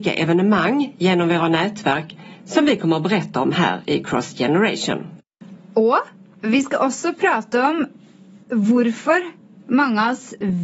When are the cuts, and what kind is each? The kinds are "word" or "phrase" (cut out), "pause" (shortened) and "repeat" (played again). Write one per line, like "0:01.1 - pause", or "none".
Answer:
none